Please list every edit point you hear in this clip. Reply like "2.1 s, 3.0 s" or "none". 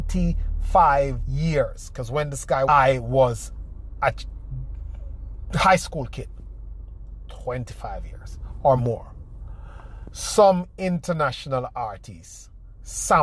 1.2 s, 2.7 s, 8.8 s